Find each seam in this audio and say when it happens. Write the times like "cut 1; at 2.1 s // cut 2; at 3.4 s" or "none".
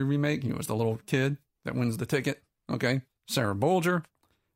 cut 1; at 1.5 s // cut 2; at 3.1 s

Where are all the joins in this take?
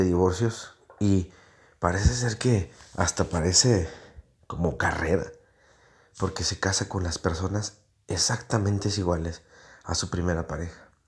none

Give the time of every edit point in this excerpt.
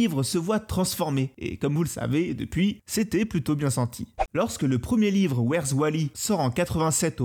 none

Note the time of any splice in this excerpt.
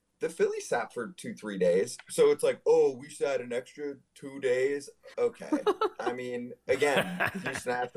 cut 1; at 4.0 s // cut 2; at 5.1 s

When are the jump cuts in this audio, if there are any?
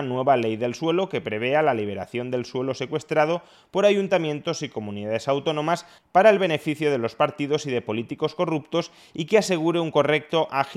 none

